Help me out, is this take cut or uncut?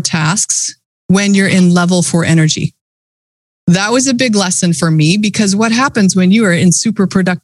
uncut